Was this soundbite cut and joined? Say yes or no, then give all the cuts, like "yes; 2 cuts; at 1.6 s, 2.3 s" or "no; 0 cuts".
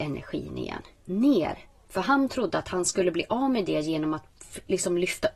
no; 0 cuts